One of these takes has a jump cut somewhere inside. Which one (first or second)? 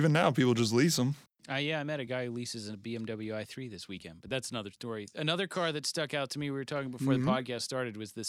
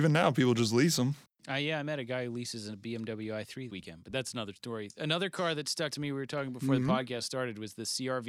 second